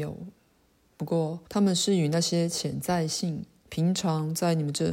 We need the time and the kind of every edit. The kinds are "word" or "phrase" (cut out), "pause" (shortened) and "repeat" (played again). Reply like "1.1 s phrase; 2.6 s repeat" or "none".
1.5 s pause